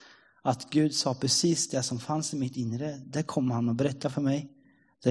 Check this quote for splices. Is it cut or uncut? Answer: uncut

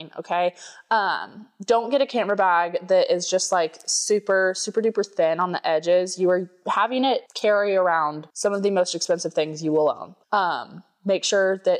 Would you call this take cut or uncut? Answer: cut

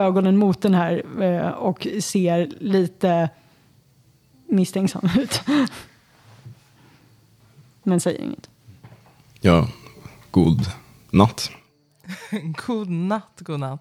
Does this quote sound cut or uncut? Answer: uncut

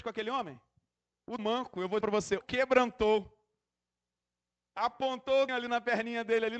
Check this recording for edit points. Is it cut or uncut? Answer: cut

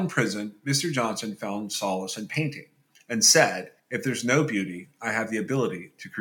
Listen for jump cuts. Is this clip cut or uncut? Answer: cut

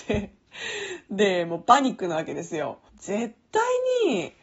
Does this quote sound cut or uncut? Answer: cut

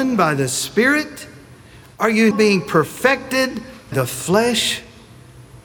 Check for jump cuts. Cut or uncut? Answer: cut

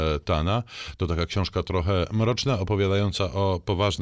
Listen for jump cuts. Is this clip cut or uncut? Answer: uncut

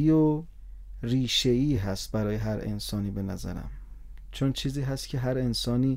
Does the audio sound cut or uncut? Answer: uncut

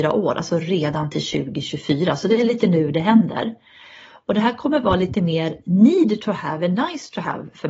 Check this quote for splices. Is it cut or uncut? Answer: uncut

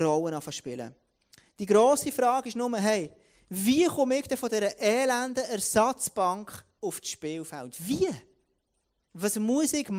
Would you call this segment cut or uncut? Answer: uncut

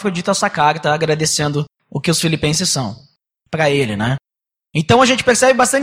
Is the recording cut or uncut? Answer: cut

